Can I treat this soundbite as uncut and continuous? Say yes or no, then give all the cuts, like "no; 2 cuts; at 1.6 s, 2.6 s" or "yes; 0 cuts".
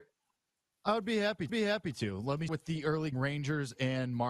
no; 3 cuts; at 1.5 s, 2.5 s, 3.1 s